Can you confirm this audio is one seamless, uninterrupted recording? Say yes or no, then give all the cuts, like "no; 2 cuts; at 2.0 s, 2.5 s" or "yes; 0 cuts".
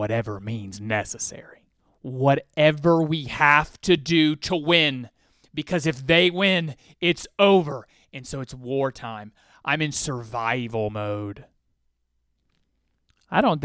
yes; 0 cuts